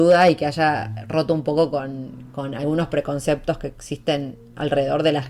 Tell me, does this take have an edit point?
no; 0 cuts

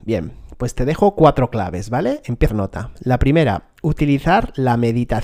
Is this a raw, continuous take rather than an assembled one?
no; 1 cut; at 2.5 s

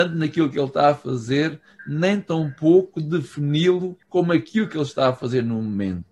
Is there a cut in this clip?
yes; 1 cut; at 4.0 s

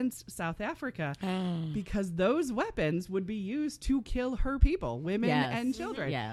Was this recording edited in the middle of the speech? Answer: no; 0 cuts

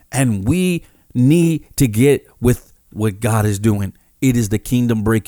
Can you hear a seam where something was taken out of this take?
no; 0 cuts

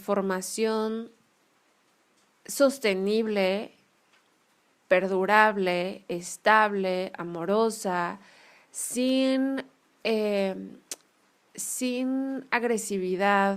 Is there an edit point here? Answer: no; 0 cuts

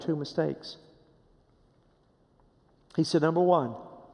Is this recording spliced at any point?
no; 0 cuts

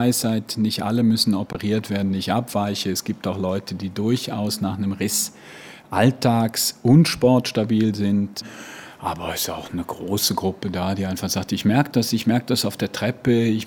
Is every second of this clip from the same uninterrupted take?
yes; 0 cuts

